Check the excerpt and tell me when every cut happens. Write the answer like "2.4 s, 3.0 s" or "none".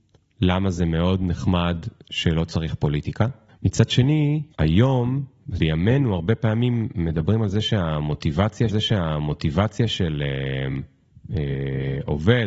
3.5 s, 4.5 s, 5.6 s, 8.7 s